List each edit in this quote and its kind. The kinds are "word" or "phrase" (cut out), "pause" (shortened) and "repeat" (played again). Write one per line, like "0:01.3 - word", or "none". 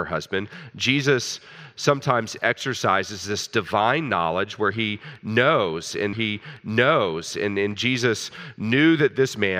0:06.1 - repeat